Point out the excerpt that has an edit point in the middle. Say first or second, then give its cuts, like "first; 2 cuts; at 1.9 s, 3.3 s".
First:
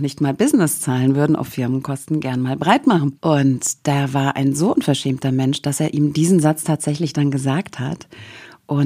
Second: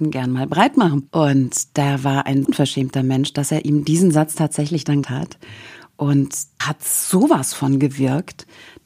second; 3 cuts; at 2.4 s, 5.0 s, 6.6 s